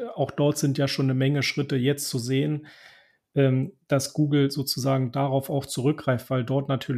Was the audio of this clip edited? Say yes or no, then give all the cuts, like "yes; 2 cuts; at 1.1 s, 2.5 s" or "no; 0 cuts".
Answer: no; 0 cuts